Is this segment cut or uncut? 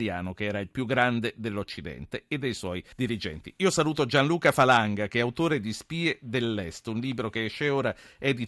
cut